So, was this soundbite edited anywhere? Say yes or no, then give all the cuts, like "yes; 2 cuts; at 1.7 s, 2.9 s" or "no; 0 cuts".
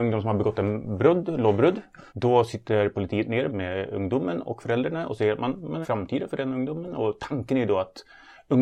yes; 3 cuts; at 2.1 s, 3.5 s, 5.8 s